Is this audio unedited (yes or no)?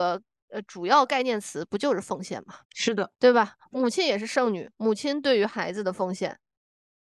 no